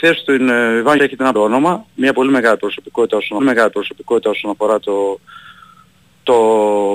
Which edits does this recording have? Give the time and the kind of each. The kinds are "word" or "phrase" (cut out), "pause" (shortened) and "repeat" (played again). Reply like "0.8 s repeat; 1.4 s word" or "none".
1.0 s word; 1.3 s phrase; 3.4 s repeat